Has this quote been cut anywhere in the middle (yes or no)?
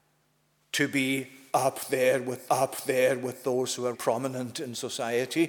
yes